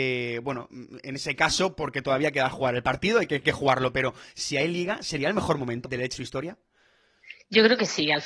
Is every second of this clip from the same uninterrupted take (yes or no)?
no